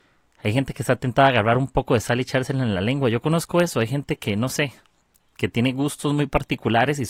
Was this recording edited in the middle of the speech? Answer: no; 0 cuts

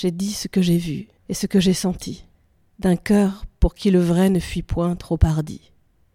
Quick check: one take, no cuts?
no; 2 cuts; at 1.2 s, 2.3 s

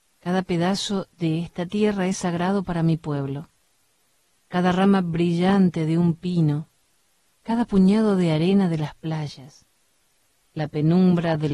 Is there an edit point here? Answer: no; 0 cuts

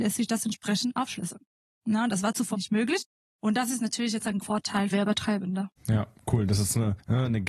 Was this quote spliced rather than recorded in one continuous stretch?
yes; 3 cuts; at 2.5 s, 4.4 s, 4.9 s

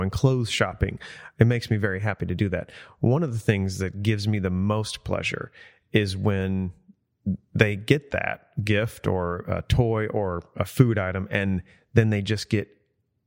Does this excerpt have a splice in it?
no; 0 cuts

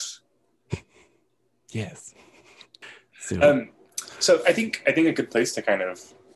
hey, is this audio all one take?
yes; 0 cuts

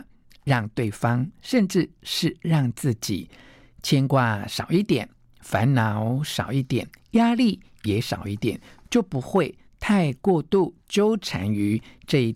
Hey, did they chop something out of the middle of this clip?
no; 0 cuts

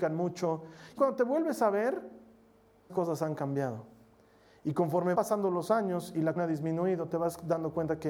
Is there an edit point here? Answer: yes; 4 cuts; at 1.0 s, 2.9 s, 5.1 s, 6.4 s

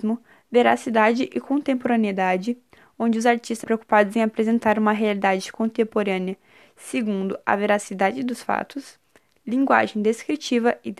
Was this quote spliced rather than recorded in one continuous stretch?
yes; 1 cut; at 3.6 s

